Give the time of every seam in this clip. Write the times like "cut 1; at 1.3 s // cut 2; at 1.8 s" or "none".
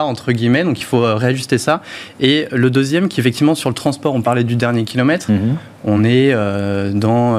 none